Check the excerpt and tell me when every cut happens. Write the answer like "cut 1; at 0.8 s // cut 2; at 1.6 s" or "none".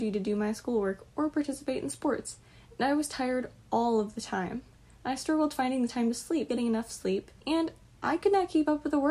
cut 1; at 6.5 s // cut 2; at 7.4 s